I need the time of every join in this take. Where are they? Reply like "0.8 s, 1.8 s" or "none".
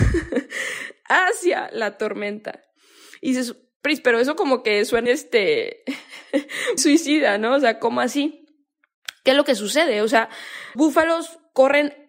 5.1 s, 6.8 s, 10.8 s